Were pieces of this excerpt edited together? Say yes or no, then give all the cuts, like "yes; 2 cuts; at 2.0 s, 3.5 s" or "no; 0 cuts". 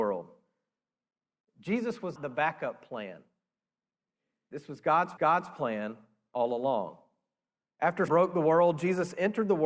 yes; 3 cuts; at 2.2 s, 5.2 s, 8.1 s